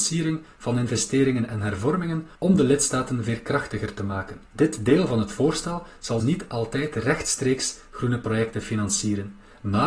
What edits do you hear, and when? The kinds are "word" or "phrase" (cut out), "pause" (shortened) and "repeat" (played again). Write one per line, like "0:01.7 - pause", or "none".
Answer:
0:02.4 - pause
0:04.5 - pause
0:06.2 - word